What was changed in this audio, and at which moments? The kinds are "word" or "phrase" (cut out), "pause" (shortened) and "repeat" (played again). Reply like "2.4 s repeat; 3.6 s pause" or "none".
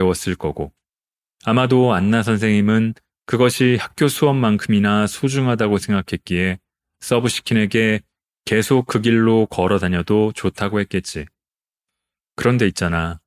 none